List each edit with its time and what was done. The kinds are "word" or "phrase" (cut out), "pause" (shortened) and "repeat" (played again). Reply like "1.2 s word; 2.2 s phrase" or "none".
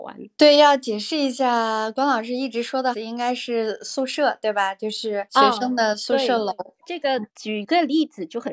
2.9 s word